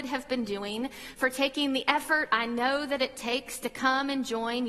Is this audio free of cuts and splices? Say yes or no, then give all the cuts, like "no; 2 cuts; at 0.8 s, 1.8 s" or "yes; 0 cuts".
yes; 0 cuts